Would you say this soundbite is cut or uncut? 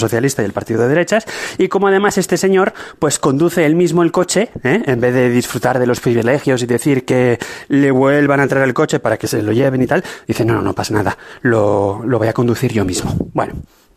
uncut